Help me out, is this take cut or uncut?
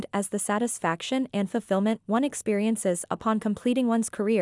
uncut